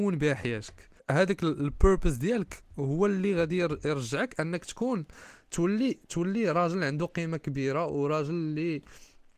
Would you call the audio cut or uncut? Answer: cut